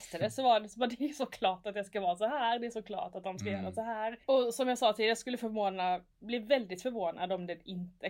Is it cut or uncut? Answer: cut